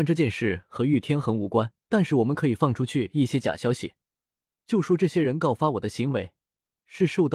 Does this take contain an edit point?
yes; 1 cut; at 1.8 s

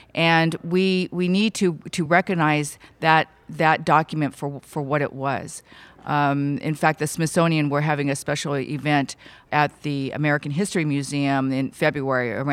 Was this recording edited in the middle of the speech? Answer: no; 0 cuts

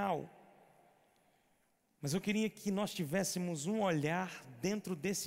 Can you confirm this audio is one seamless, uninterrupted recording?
yes; 0 cuts

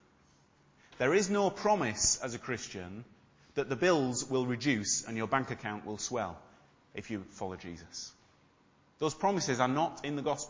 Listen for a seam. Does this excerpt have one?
no; 0 cuts

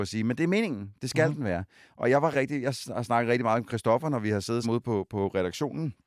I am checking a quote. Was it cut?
yes; 2 cuts; at 2.3 s, 4.6 s

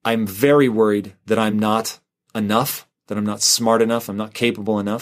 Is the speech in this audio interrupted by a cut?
no; 0 cuts

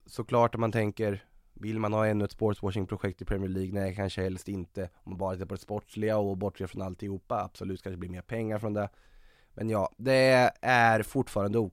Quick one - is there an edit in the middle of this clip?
no; 0 cuts

